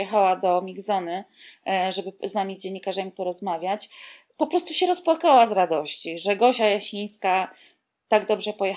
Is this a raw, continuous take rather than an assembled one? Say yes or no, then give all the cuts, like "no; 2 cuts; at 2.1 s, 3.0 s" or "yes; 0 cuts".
yes; 0 cuts